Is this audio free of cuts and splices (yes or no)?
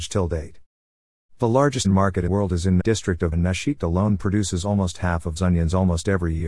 no